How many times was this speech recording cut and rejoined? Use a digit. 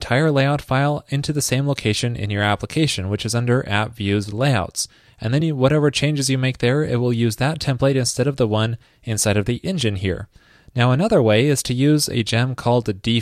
0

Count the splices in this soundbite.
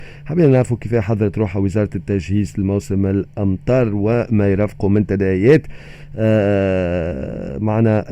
0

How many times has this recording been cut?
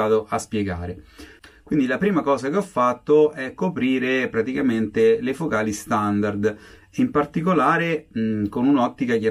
0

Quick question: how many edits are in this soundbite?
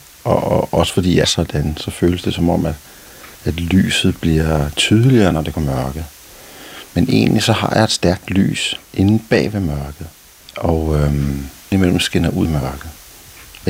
7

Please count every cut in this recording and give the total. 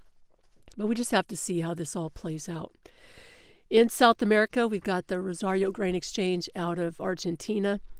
0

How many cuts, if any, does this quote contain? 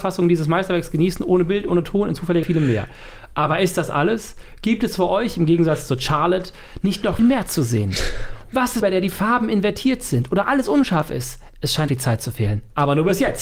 5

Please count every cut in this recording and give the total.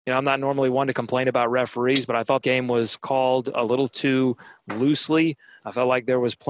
1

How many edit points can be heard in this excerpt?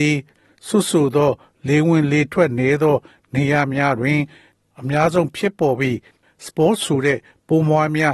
0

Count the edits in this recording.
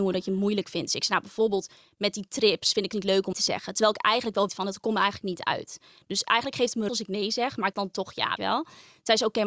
6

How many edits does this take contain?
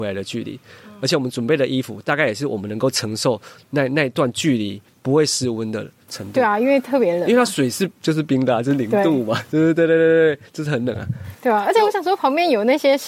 1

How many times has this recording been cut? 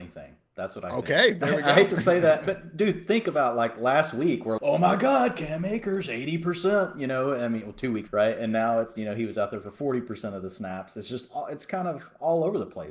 2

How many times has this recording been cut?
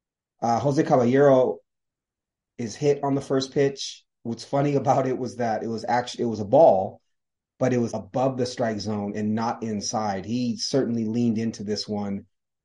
1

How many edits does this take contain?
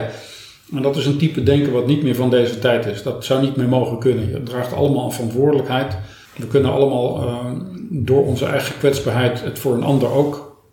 1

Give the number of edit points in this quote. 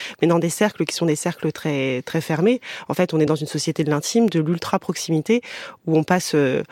0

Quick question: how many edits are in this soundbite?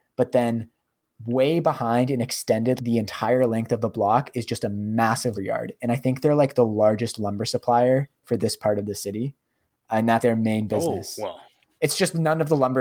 3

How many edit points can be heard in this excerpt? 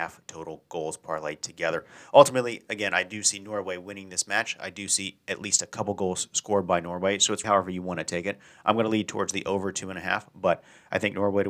1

